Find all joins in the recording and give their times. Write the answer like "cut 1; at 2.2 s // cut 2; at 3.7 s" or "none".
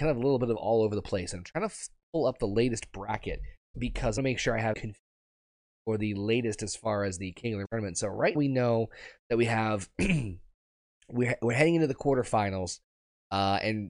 cut 1; at 3.7 s // cut 2; at 4.2 s // cut 3; at 4.7 s // cut 4; at 7.7 s // cut 5; at 8.3 s